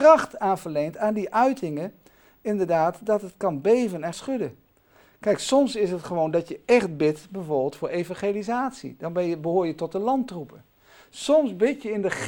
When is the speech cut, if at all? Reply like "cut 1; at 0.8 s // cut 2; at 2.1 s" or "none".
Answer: cut 1; at 4.1 s

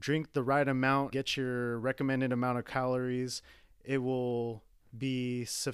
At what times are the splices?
cut 1; at 1.1 s

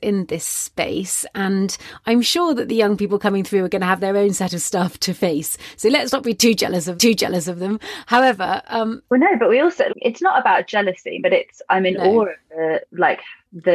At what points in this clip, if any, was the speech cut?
cut 1; at 7.0 s // cut 2; at 9.9 s // cut 3; at 11.2 s

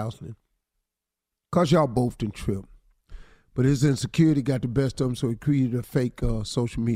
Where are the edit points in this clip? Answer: none

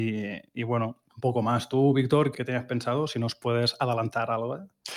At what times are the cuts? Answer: cut 1; at 1.1 s // cut 2; at 2.3 s

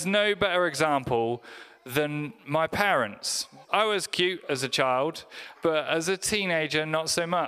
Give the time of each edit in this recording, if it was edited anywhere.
cut 1; at 3.6 s // cut 2; at 5.5 s

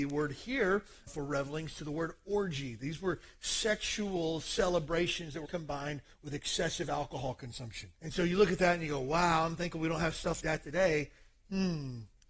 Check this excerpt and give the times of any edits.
cut 1; at 1.1 s // cut 2; at 5.4 s // cut 3; at 7.9 s // cut 4; at 10.4 s

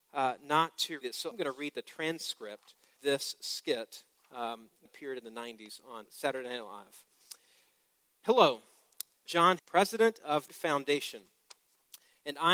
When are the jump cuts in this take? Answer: cut 1; at 1.0 s // cut 2; at 1.3 s // cut 3; at 3.0 s // cut 4; at 4.9 s // cut 5; at 6.1 s // cut 6; at 9.3 s // cut 7; at 9.6 s // cut 8; at 10.5 s

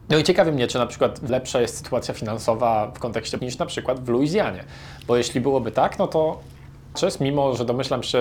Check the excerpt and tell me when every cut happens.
cut 1; at 1.3 s // cut 2; at 3.4 s // cut 3; at 6.9 s

